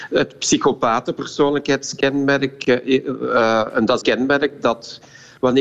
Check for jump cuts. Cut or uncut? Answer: cut